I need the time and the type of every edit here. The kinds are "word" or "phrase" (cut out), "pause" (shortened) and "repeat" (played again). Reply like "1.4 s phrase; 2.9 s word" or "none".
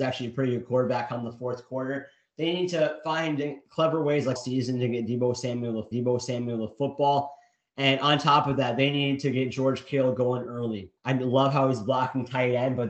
4.4 s phrase; 5.9 s repeat; 11.0 s pause